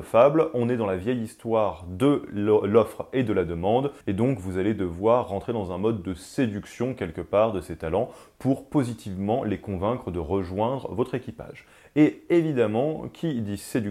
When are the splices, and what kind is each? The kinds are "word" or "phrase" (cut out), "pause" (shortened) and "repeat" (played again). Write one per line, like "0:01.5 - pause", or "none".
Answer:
0:04.0 - pause